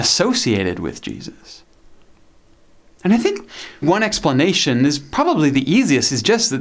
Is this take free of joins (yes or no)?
no